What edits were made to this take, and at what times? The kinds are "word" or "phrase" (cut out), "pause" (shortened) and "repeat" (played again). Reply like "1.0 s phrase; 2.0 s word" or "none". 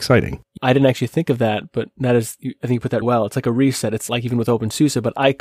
3.0 s word